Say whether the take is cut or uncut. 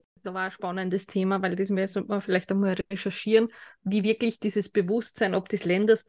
uncut